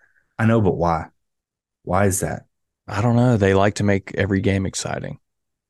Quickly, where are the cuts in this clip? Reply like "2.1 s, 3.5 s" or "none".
none